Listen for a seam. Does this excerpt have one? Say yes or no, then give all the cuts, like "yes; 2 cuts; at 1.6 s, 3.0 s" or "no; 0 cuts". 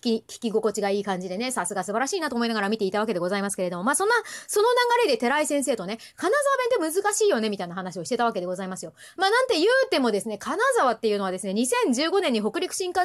no; 0 cuts